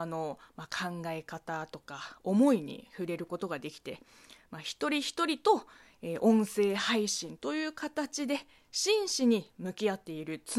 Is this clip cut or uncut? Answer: uncut